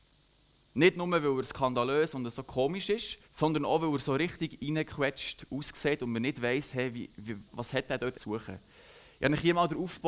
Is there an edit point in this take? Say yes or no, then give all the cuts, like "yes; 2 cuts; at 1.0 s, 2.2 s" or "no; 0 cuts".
yes; 4 cuts; at 1.4 s, 3.2 s, 7.5 s, 8.1 s